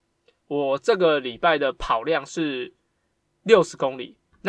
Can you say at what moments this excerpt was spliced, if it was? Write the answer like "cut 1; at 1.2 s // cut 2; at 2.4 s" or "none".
none